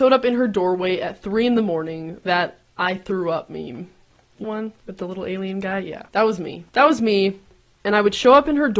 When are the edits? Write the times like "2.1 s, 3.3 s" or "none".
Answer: 2.2 s, 4.4 s, 6.1 s, 6.7 s